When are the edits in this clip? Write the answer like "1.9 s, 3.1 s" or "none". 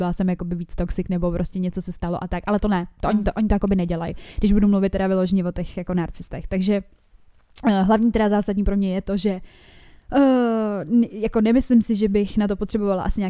none